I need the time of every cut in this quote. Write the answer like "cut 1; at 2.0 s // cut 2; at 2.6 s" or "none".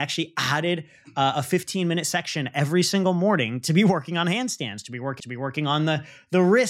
cut 1; at 5.2 s